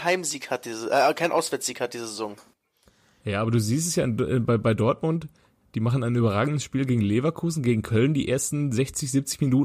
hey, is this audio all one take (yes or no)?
yes